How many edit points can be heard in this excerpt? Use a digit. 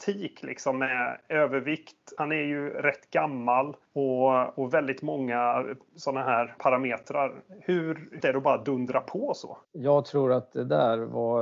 5